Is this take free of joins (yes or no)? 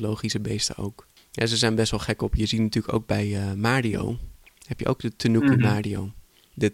yes